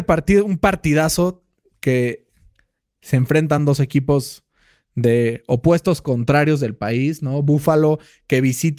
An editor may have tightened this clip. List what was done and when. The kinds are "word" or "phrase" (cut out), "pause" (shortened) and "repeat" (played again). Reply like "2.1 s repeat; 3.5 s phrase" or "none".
none